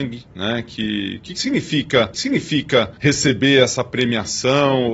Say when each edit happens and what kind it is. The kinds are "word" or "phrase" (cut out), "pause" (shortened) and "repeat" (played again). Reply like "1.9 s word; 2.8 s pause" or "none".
2.1 s repeat

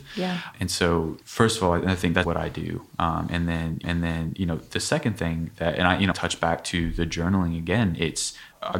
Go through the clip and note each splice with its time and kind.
1.2 s pause; 2.2 s word; 3.8 s repeat; 6.1 s phrase

